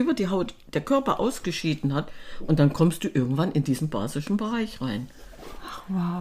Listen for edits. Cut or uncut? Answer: uncut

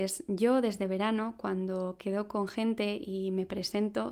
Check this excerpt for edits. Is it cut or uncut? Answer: uncut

